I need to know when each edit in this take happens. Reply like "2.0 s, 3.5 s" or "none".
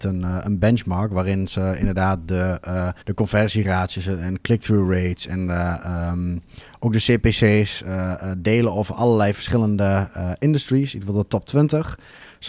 3.0 s

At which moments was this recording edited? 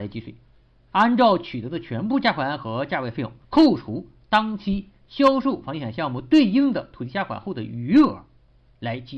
3.4 s

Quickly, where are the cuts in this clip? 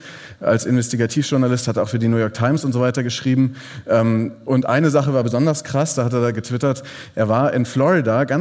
none

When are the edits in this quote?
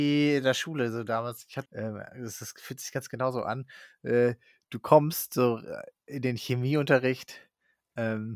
1.7 s

